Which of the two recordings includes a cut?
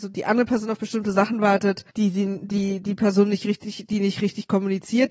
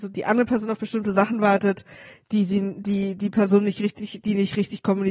first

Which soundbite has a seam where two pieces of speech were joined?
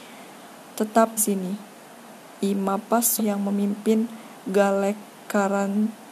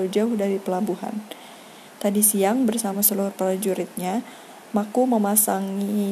first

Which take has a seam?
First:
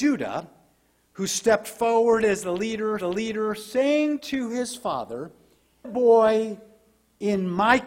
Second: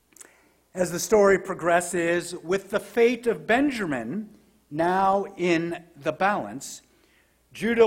first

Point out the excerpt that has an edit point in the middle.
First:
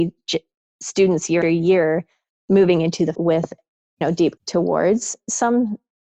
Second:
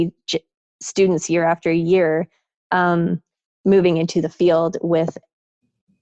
first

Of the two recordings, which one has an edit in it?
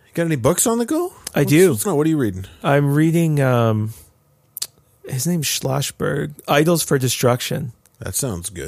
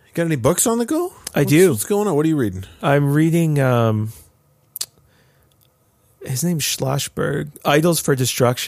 first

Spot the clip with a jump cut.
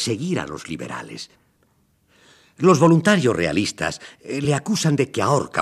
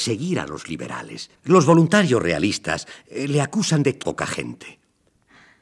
second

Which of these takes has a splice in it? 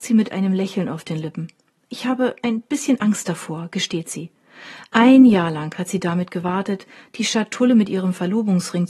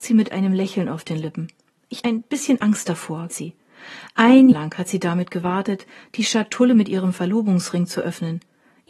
second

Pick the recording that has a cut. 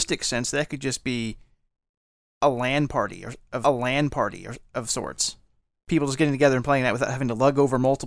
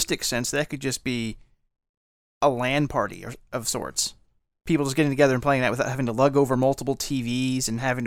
first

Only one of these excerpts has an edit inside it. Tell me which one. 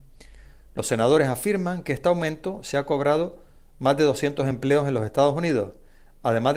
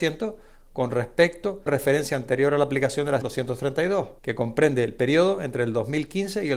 second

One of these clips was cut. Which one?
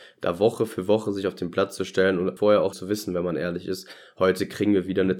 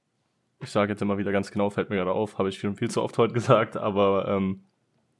first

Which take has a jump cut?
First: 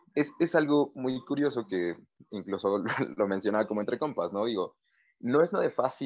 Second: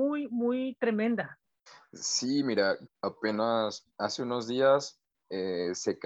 second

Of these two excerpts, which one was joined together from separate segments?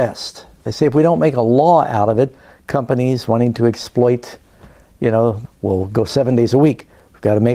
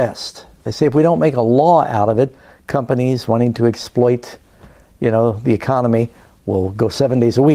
first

